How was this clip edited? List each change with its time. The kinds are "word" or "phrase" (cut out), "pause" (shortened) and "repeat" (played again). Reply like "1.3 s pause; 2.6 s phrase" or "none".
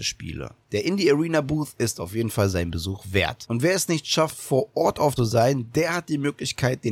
5.2 s phrase

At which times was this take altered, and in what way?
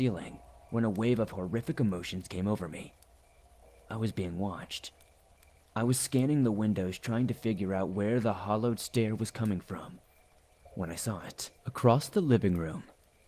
11.6 s pause

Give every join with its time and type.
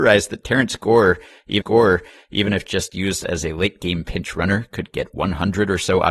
1.6 s repeat

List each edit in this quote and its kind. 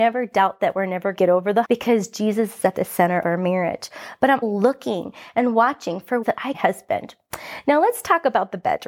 1.1 s phrase; 1.6 s word; 3.2 s word; 4.4 s word; 6.2 s word; 6.5 s phrase

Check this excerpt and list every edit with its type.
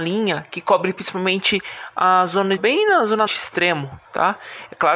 2.6 s phrase; 3.3 s word; 4.0 s pause

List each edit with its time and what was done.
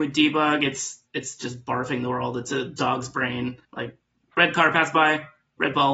1.1 s pause; 3.6 s pause

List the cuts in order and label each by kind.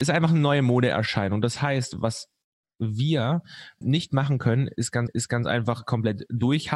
3.8 s word; 5.1 s repeat

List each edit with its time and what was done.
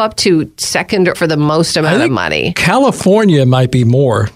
1.1 s phrase

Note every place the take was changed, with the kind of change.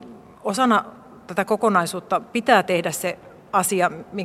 none

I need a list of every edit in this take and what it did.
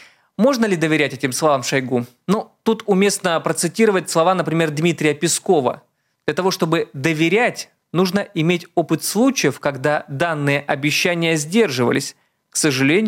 none

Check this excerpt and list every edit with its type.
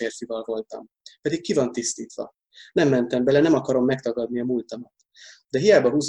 none

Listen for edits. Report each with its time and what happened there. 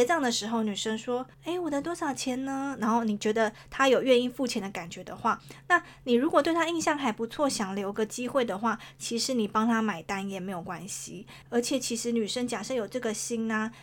1.3 s pause

